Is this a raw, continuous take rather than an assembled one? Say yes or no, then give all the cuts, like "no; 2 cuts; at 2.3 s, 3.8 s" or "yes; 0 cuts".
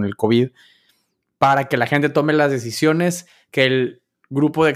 yes; 0 cuts